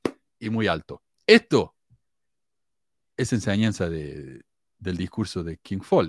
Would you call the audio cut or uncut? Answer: uncut